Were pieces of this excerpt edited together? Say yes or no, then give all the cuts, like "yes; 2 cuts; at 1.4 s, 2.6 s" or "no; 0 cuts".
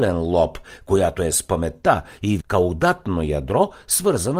yes; 2 cuts; at 1.3 s, 2.4 s